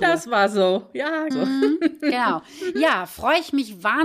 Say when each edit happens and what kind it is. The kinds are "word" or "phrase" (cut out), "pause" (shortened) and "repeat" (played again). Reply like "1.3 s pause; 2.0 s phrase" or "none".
1.3 s word